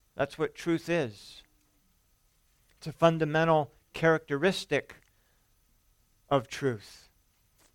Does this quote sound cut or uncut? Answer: uncut